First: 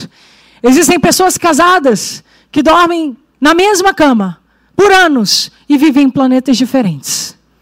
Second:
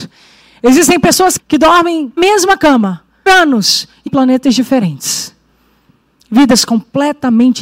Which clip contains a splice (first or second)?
second